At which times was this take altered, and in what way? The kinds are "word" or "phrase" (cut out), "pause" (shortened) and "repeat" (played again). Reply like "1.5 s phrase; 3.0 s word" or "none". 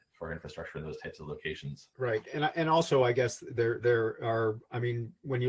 1.9 s pause